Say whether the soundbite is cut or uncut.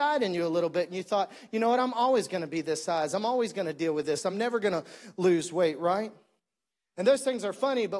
uncut